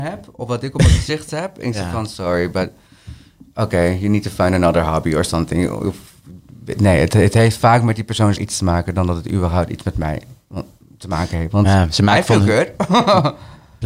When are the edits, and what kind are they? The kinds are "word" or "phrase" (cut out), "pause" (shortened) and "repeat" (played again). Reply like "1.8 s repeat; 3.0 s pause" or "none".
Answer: 8.4 s word